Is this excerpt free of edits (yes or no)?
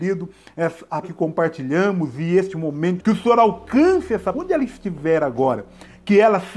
no